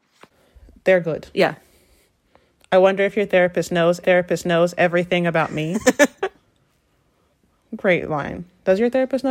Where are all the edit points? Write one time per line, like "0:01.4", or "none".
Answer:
0:04.0